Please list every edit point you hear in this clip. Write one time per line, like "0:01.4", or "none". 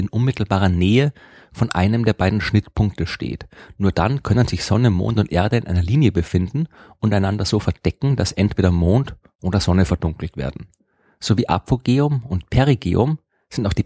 none